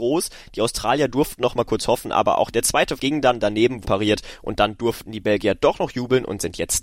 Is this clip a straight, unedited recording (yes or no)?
no